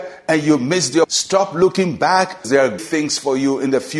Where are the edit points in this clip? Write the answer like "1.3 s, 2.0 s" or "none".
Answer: 1.0 s, 2.4 s, 2.8 s